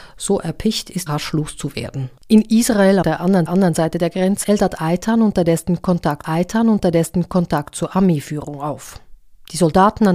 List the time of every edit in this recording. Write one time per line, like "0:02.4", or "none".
0:01.1
0:02.2
0:03.0
0:03.5
0:04.4
0:06.2